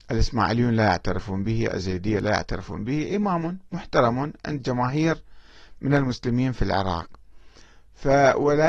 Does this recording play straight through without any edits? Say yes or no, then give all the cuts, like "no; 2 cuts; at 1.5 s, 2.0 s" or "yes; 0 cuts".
yes; 0 cuts